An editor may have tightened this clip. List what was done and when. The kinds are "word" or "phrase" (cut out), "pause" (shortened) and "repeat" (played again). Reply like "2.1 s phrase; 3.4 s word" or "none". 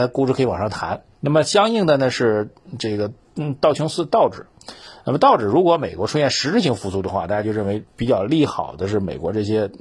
1.1 s pause